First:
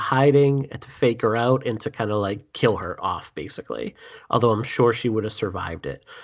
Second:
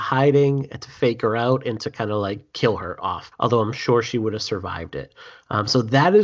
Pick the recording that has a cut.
second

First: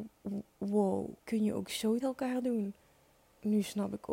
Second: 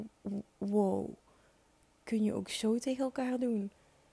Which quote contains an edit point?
first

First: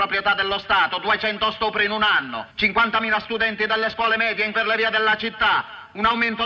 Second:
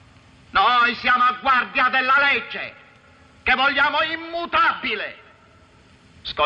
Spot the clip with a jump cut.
first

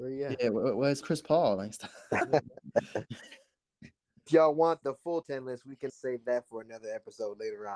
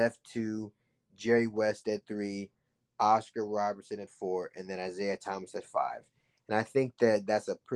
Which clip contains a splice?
first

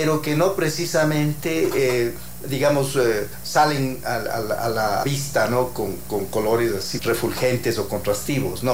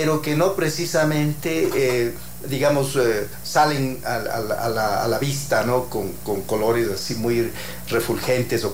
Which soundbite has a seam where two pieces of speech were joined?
first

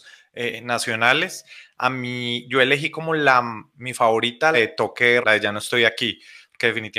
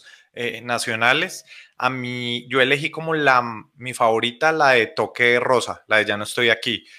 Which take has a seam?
first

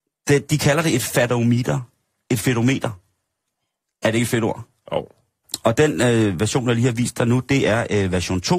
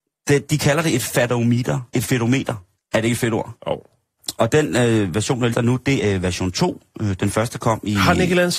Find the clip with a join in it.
second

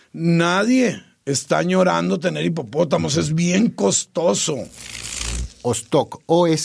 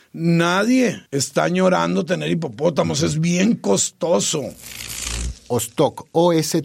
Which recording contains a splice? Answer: second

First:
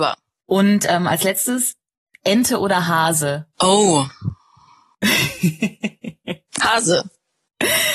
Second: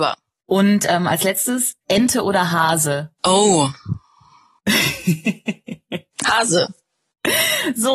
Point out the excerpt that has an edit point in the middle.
second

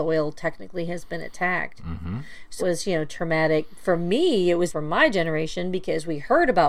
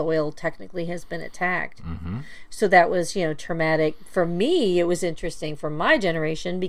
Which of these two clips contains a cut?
first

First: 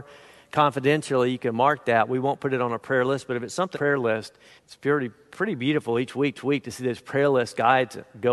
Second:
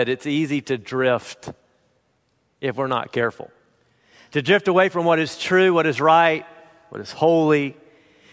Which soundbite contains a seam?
first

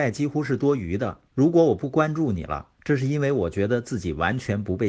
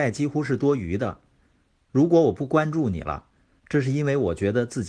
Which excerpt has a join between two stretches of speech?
first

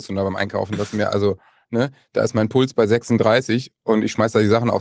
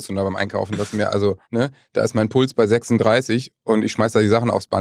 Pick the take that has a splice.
second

